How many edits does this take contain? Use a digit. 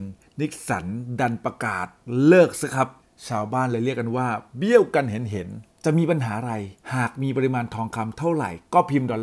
3